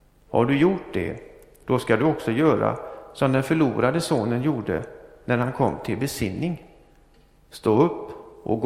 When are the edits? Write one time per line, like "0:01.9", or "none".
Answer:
none